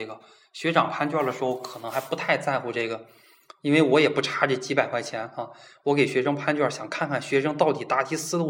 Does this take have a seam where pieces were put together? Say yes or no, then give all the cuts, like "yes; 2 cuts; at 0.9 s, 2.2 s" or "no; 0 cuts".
no; 0 cuts